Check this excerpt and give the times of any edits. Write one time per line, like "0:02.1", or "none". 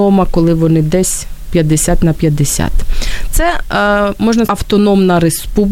0:04.5